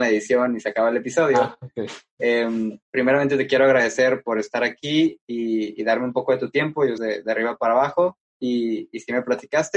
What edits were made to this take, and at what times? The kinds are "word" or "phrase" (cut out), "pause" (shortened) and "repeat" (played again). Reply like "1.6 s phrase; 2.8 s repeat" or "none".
2.8 s pause; 7.0 s phrase; 8.3 s pause